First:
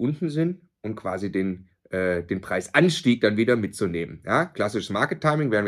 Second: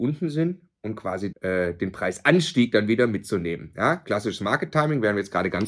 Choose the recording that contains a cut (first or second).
second